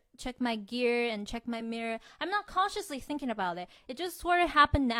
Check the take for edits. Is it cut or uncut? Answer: uncut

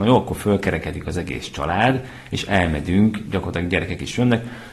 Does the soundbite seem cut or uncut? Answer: uncut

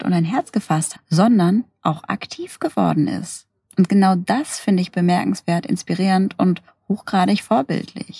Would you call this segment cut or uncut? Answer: cut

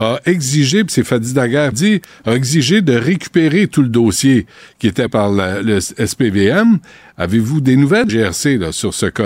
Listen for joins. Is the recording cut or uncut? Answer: cut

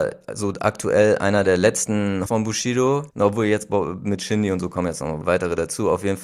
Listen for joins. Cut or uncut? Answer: cut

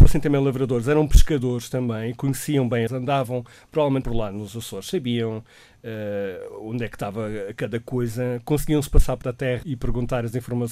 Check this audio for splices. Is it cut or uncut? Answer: cut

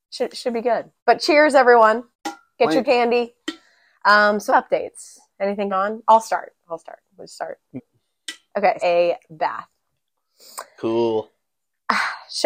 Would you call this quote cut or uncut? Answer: cut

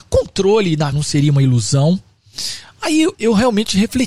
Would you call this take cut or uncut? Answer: cut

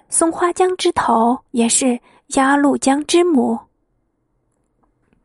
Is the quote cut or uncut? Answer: cut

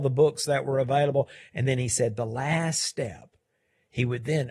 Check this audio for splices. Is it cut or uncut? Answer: uncut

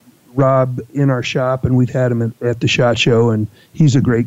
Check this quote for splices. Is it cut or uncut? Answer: uncut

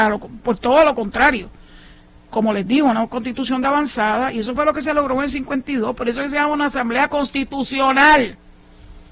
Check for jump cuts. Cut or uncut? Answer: uncut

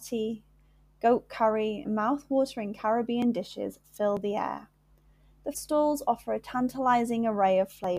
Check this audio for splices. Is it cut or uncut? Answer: cut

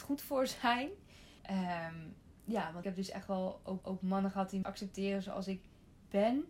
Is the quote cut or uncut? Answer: cut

